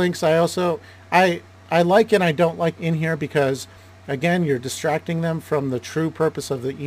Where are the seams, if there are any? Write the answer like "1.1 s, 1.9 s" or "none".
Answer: 2.7 s